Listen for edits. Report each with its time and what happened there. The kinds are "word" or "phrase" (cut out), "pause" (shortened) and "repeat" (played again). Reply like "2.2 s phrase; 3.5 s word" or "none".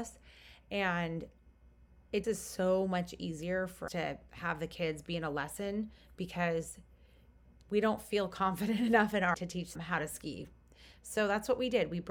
2.2 s word; 3.9 s word; 9.3 s word; 9.8 s word